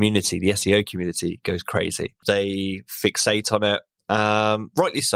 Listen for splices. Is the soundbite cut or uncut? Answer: uncut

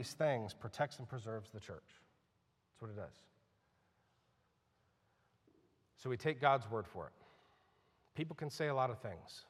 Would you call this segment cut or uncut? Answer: uncut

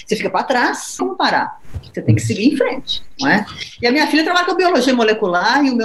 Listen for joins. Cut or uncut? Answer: cut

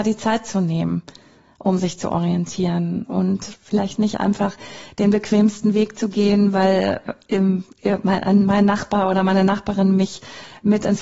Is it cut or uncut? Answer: uncut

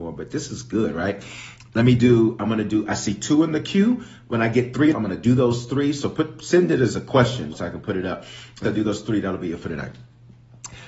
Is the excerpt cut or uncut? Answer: cut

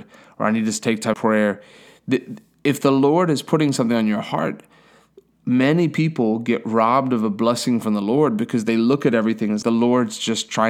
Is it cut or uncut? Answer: cut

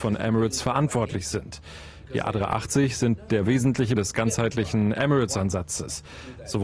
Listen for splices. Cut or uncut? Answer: cut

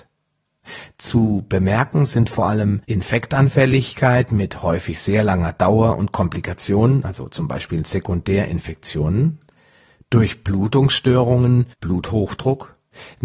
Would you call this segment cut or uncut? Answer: cut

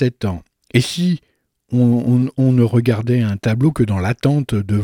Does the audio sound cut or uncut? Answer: uncut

